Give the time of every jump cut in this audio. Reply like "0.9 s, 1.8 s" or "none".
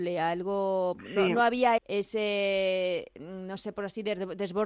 1.8 s